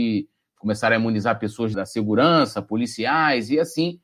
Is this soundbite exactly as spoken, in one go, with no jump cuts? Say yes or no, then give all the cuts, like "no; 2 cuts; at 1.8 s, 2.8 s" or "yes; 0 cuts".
no; 1 cut; at 1.7 s